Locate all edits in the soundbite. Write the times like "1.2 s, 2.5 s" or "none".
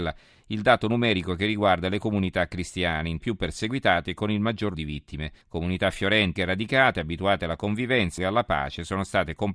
3.2 s, 4.7 s, 5.4 s, 6.4 s, 8.2 s